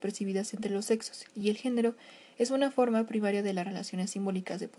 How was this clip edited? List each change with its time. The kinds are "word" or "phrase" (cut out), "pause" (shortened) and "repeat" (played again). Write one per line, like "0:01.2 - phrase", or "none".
none